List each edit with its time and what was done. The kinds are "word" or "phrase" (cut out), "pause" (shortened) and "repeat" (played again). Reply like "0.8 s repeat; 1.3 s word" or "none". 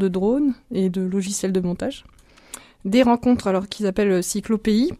none